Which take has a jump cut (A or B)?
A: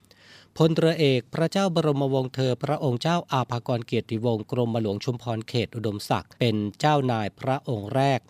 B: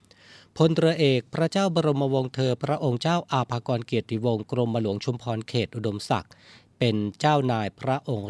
A